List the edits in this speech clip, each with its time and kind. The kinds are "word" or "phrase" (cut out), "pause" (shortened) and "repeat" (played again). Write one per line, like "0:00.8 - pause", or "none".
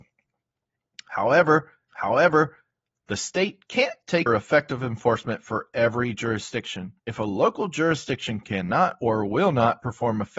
0:01.9 - repeat
0:04.3 - word
0:07.0 - pause